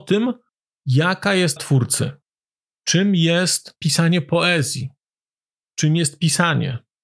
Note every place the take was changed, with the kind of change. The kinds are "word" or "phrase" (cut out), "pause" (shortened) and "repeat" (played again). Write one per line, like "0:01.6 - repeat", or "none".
0:01.6 - word